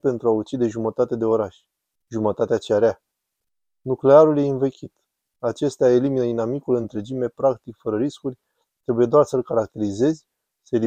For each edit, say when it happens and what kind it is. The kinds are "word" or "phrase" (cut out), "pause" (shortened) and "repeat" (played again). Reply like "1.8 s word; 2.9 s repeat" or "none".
none

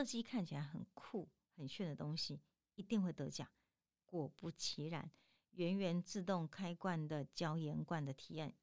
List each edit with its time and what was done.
none

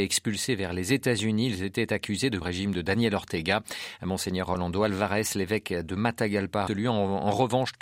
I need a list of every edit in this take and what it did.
2.4 s phrase; 6.7 s word

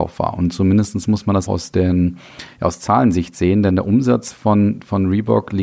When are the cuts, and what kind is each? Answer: 1.5 s word

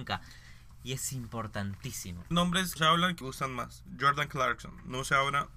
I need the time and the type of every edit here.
2.3 s phrase; 2.8 s phrase; 3.2 s word

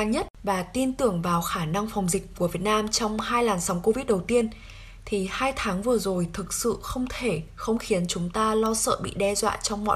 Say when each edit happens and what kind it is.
none

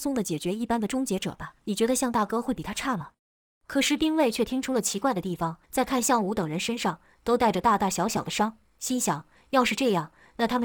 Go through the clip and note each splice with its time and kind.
1.6 s pause; 3.2 s pause; 5.6 s pause

